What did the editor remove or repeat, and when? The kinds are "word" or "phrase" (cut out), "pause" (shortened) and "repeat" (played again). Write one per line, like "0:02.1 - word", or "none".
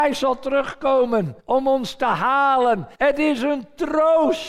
0:01.4 - pause
0:02.9 - pause